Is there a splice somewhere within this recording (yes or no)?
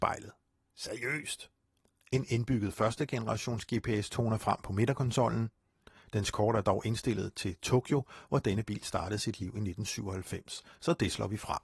no